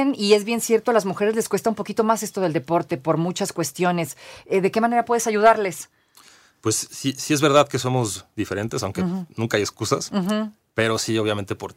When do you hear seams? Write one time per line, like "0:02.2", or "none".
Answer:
none